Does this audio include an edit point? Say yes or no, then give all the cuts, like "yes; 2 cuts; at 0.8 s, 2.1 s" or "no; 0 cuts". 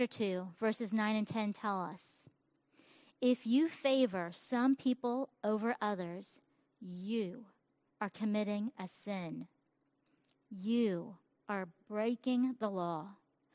no; 0 cuts